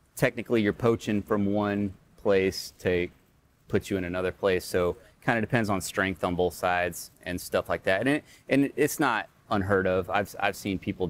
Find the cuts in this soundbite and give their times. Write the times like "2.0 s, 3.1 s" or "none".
none